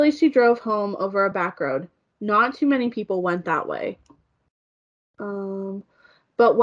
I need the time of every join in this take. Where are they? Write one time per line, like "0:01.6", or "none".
none